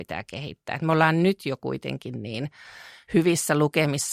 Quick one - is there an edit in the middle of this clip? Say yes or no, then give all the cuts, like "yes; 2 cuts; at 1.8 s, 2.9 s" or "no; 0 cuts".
no; 0 cuts